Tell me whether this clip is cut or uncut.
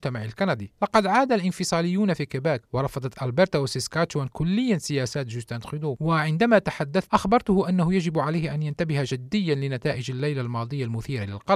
cut